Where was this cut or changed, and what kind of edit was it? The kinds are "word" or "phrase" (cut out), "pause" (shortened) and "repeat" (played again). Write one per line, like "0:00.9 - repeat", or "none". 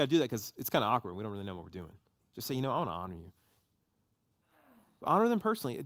none

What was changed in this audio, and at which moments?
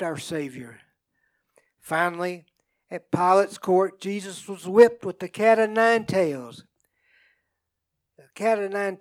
none

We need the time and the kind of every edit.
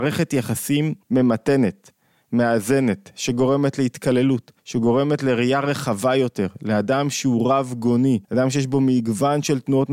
0:01.0 - pause
0:04.6 - pause
0:08.2 - pause

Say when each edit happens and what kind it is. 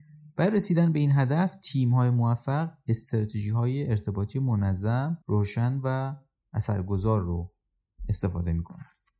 0:05.2 - pause

